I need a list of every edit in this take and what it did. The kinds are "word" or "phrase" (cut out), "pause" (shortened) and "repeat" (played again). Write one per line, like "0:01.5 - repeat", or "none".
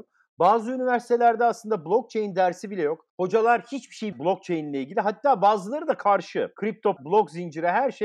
0:03.1 - pause
0:04.1 - word
0:07.0 - word